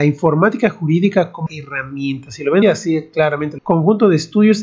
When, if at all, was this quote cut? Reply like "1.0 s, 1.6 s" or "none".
1.5 s, 2.6 s, 3.6 s